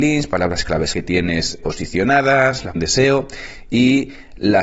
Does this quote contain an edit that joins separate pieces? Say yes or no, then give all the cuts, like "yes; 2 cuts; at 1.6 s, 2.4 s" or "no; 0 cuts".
yes; 3 cuts; at 0.9 s, 1.6 s, 2.8 s